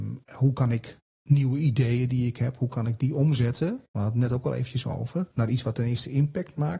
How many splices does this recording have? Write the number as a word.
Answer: one